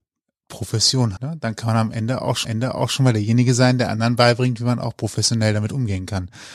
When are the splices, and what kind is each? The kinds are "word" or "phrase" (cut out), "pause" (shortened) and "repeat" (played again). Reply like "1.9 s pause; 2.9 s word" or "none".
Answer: 1.2 s word; 2.4 s repeat